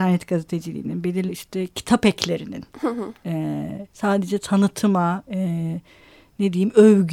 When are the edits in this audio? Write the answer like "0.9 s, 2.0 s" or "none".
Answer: 1.3 s, 3.9 s, 5.3 s